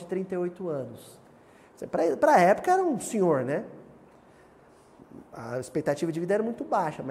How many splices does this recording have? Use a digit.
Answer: 1